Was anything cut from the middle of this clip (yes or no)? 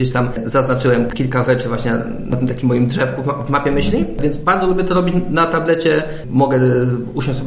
no